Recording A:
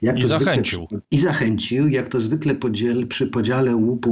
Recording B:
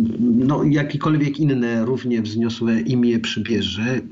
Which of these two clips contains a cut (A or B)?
A